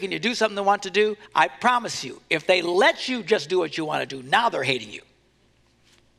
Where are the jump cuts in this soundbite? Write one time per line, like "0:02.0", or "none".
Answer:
0:01.3

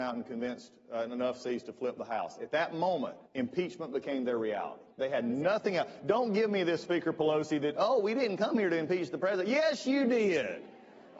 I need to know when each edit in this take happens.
0:03.3
0:04.9

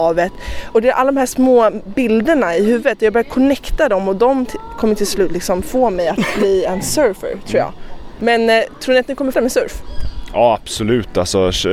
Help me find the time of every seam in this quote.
0:09.3

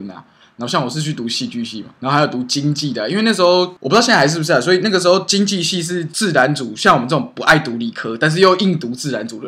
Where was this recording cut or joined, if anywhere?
0:02.0

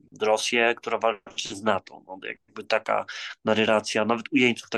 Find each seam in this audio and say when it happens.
none

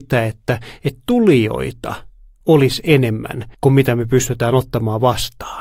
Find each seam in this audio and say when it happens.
0:03.5

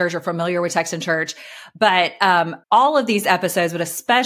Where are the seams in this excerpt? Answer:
0:02.6

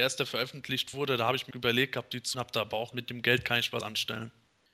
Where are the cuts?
0:01.5
0:02.3
0:02.9
0:03.8

